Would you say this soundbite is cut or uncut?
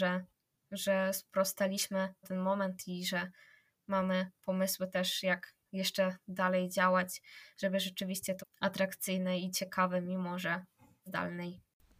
cut